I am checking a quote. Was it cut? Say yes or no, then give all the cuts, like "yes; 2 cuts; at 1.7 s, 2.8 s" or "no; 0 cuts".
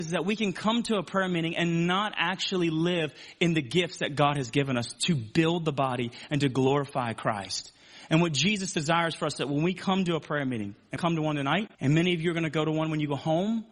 yes; 2 cuts; at 11.0 s, 11.7 s